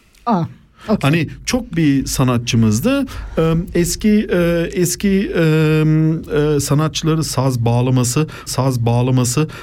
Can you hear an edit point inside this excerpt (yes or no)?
yes